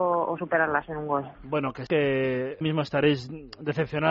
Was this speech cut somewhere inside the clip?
yes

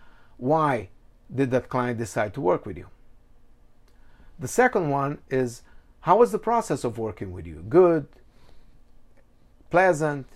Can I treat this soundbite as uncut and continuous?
yes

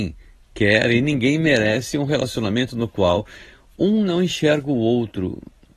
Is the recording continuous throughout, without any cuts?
yes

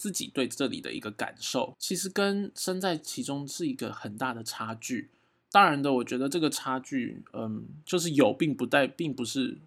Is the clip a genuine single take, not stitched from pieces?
yes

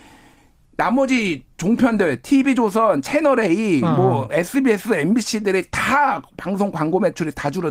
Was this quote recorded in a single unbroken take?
yes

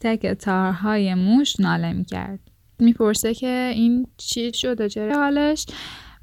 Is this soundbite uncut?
no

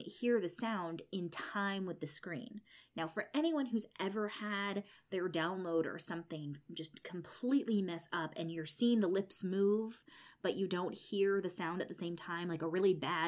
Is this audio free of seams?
yes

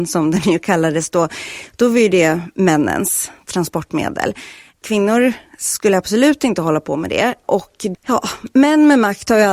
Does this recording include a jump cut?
no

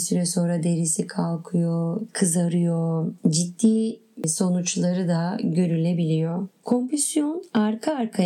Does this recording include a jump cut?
no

